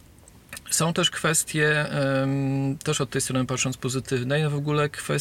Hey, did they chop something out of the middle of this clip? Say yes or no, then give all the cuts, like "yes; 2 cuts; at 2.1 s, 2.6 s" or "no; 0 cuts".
no; 0 cuts